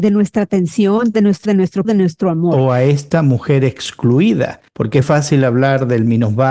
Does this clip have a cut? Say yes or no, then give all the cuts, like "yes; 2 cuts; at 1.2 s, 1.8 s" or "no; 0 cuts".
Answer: yes; 4 cuts; at 1.4 s, 1.8 s, 4.7 s, 5.0 s